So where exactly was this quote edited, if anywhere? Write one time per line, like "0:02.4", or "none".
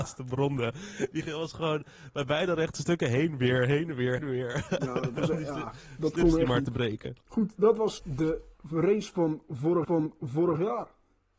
0:04.2
0:07.2
0:08.0
0:09.8